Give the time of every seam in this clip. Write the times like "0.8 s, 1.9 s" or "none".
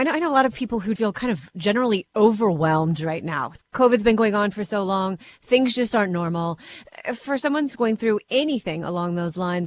1.0 s